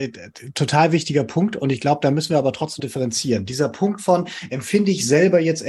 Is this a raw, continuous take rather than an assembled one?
no; 1 cut; at 2.8 s

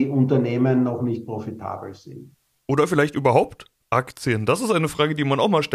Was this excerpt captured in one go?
no; 1 cut; at 2.5 s

